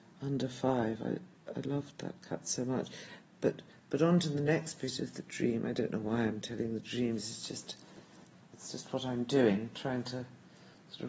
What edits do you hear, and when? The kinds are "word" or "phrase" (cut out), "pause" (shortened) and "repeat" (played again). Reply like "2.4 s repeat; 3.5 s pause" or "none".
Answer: none